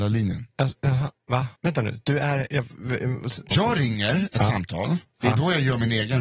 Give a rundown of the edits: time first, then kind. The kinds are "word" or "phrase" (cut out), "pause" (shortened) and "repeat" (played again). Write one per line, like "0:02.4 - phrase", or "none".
0:01.6 - pause
0:03.5 - word